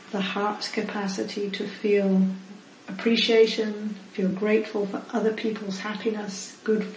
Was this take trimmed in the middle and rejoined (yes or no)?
no